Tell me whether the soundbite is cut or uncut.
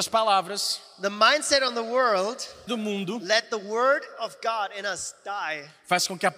cut